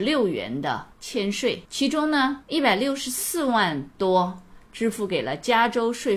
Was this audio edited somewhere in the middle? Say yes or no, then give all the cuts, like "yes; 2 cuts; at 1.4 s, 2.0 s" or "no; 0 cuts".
yes; 3 cuts; at 0.9 s, 1.6 s, 2.4 s